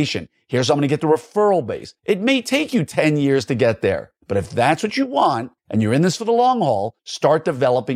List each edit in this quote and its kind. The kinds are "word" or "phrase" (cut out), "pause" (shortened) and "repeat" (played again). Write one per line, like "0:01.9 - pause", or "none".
0:02.0 - pause
0:04.2 - pause
0:05.6 - pause
0:07.0 - pause